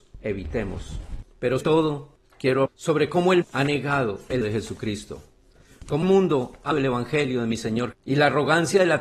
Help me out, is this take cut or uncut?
cut